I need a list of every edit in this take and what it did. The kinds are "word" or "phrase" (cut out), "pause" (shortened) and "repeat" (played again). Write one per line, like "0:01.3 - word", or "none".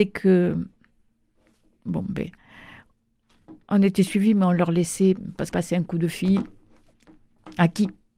0:03.6 - pause
0:05.5 - word